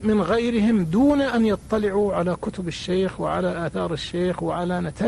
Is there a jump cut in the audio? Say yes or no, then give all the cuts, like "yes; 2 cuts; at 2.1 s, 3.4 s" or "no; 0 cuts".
no; 0 cuts